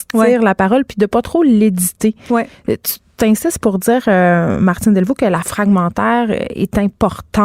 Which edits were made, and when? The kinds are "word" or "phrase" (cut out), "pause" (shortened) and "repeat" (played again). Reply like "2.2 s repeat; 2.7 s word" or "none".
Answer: 5.4 s word